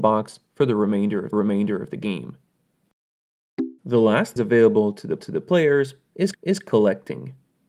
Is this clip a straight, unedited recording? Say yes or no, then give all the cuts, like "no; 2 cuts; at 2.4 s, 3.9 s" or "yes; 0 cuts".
no; 5 cuts; at 1.3 s, 3.8 s, 4.4 s, 5.2 s, 6.3 s